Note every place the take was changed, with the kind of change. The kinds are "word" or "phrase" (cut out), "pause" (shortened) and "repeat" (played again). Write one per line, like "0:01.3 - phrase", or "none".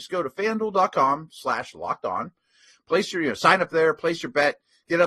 none